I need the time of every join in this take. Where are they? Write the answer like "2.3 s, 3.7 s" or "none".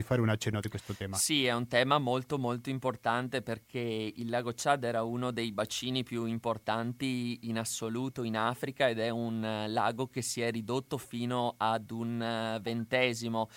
none